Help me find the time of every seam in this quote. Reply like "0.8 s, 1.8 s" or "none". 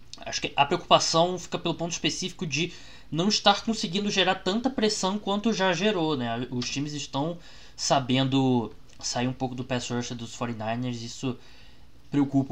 none